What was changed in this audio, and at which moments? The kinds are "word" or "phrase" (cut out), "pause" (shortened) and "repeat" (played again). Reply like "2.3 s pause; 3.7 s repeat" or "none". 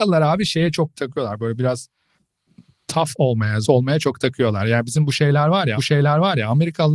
0.9 s word; 3.6 s word; 5.8 s repeat